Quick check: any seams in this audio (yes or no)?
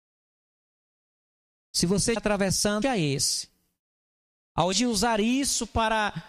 yes